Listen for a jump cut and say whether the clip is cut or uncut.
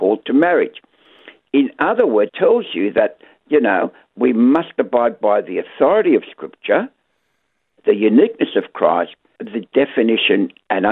cut